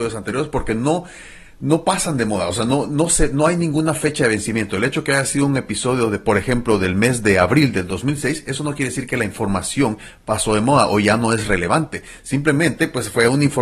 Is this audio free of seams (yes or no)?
yes